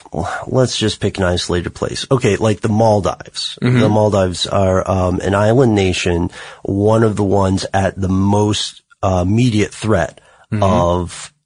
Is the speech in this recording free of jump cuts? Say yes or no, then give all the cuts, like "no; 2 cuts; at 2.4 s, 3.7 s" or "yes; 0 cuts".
yes; 0 cuts